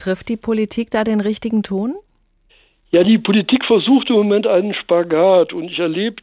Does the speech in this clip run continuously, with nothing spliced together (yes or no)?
yes